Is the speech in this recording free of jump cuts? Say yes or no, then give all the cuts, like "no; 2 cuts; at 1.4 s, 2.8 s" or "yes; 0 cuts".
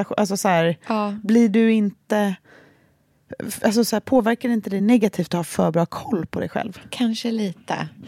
yes; 0 cuts